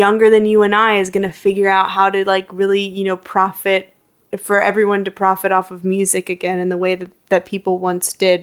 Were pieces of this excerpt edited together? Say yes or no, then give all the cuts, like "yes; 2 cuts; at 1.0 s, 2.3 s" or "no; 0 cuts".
no; 0 cuts